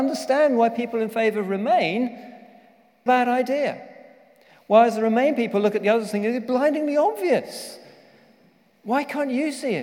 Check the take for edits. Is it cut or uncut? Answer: cut